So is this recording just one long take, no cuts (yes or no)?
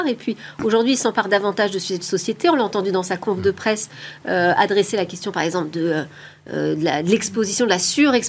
yes